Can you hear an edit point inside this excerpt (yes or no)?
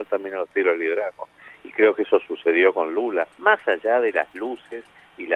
yes